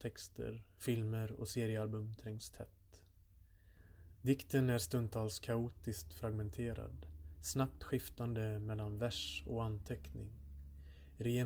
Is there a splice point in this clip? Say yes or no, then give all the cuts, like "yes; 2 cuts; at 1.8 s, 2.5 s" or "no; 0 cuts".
no; 0 cuts